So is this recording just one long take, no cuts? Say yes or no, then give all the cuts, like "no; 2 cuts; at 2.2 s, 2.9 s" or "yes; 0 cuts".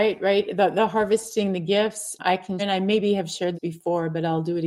no; 3 cuts; at 2.2 s, 2.6 s, 3.5 s